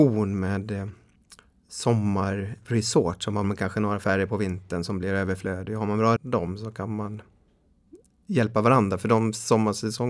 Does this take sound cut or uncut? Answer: cut